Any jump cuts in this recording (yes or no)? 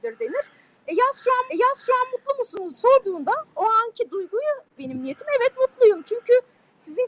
yes